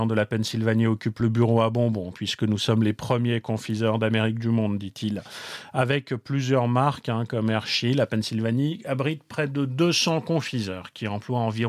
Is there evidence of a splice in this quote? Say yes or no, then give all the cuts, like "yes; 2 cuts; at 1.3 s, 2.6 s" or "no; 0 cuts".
no; 0 cuts